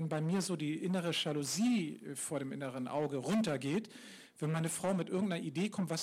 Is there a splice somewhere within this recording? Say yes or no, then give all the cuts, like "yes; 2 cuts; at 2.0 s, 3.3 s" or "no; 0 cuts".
no; 0 cuts